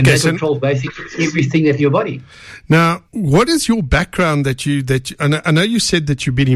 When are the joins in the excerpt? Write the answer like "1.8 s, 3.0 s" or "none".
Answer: 1.8 s, 3.1 s